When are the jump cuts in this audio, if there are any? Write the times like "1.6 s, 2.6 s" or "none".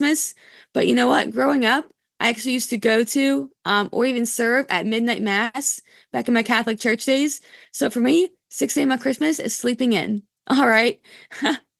none

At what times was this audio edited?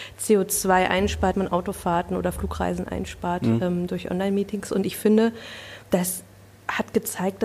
1.3 s, 5.8 s

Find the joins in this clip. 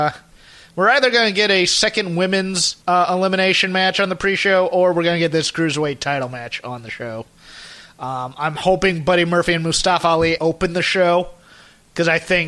2.8 s, 10.4 s

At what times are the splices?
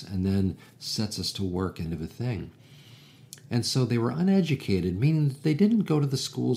1.9 s

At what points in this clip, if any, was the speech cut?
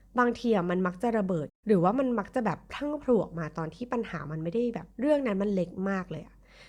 4.9 s

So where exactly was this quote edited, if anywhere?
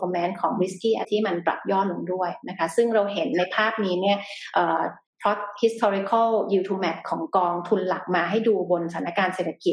1.0 s

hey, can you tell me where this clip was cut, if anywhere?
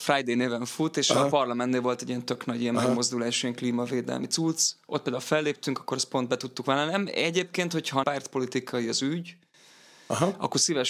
8.0 s

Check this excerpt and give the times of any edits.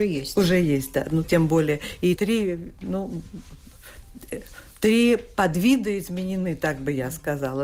1.2 s, 2.2 s

